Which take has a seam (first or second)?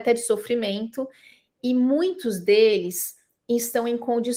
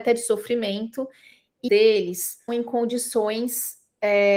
second